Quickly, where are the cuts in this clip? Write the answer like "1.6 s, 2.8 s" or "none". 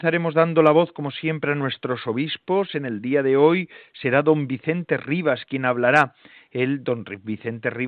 none